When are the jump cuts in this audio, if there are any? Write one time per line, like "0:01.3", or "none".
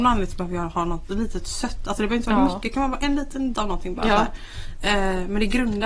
0:03.5